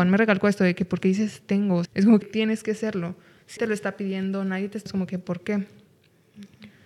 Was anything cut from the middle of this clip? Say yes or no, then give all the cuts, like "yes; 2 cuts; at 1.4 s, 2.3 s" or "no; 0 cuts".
yes; 4 cuts; at 1.9 s, 2.2 s, 3.6 s, 4.9 s